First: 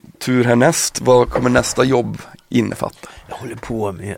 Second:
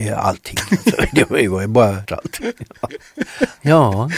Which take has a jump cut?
second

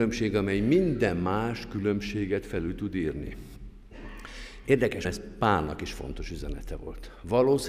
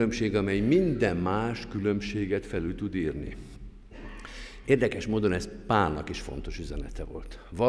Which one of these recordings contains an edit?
first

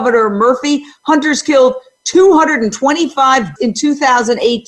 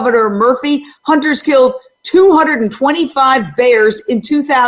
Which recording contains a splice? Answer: first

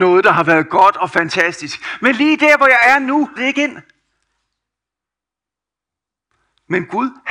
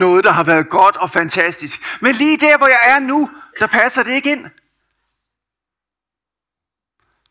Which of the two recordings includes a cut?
first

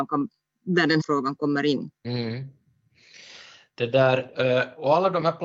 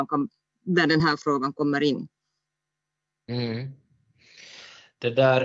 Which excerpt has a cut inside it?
first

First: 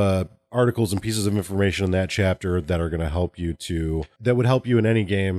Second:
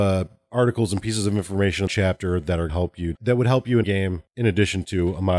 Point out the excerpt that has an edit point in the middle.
second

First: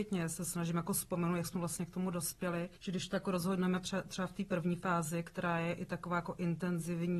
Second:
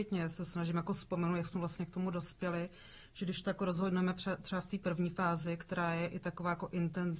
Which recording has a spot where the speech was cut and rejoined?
first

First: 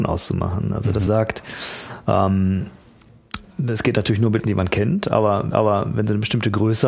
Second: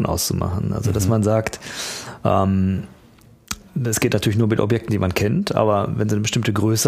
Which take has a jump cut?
first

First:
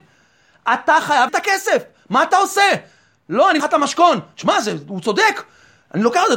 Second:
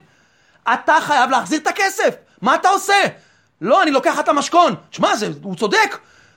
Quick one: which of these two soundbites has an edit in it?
first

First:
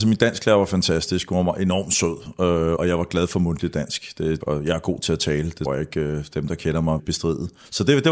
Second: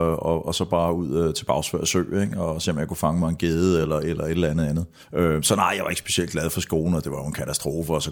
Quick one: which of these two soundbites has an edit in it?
first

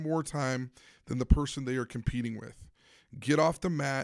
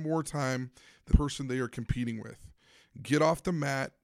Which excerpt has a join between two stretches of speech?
second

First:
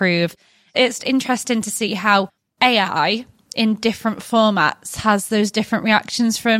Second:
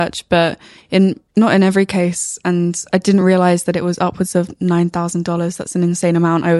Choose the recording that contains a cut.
first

